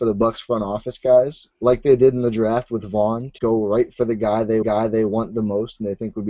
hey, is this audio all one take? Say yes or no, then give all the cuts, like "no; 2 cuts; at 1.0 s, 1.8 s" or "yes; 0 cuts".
no; 3 cuts; at 1.5 s, 3.4 s, 4.6 s